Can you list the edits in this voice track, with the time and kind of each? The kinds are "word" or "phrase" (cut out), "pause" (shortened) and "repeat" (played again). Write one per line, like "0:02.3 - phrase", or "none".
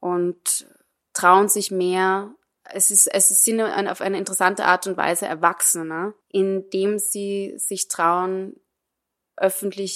0:06.2 - pause

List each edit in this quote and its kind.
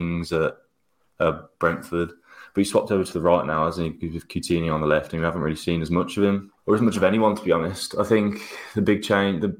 0:06.6 - pause

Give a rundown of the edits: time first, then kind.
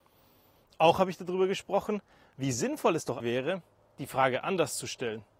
0:03.2 - word

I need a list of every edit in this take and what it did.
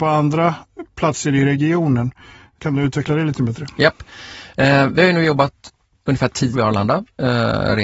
0:06.5 - word

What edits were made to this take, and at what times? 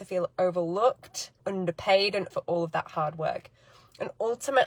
0:01.4 - word
0:02.3 - word

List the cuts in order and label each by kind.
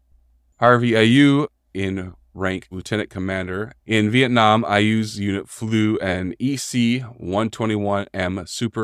0:01.7 - word
0:02.7 - word
0:03.8 - pause

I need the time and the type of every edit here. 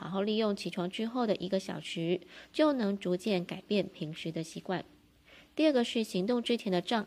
none

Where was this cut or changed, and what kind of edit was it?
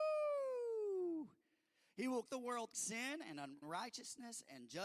0:02.3 - word
0:02.7 - word
0:03.6 - word

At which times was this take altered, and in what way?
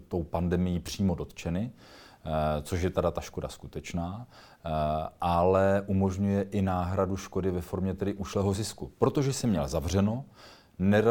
none

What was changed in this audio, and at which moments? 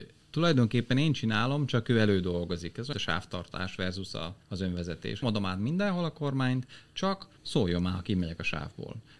0:02.9 - word
0:04.4 - pause
0:05.2 - word
0:07.4 - pause

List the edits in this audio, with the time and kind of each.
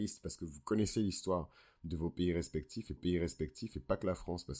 0:03.0 - repeat

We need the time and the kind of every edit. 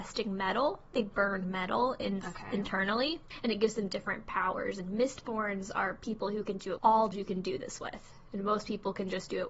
0:00.9 - word
0:06.8 - word
0:07.1 - word

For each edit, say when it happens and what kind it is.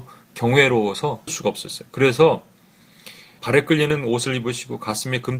0:01.3 - word
0:03.4 - word

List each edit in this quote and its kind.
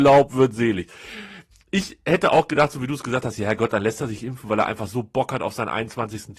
none

